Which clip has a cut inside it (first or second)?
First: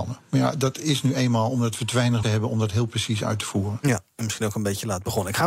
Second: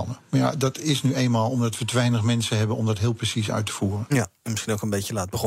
first